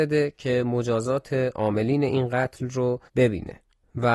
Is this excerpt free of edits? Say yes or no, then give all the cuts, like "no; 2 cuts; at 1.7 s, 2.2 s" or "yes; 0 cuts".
no; 1 cut; at 3.1 s